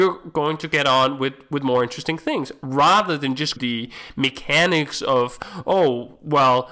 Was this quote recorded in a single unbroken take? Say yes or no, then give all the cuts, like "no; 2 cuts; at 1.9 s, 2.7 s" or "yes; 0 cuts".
no; 1 cut; at 3.6 s